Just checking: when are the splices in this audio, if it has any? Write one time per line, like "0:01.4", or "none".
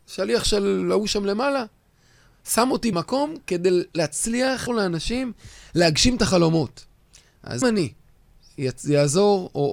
0:02.9
0:04.7
0:07.6